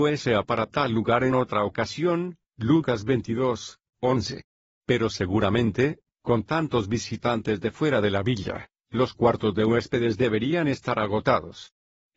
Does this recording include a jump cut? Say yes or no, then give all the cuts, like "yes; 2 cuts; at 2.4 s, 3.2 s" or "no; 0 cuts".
no; 0 cuts